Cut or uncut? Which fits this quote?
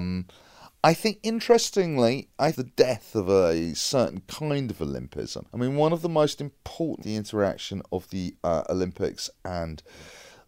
cut